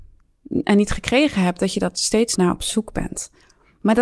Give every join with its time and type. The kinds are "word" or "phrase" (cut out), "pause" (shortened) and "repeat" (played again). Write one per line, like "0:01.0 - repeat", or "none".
0:02.3 - word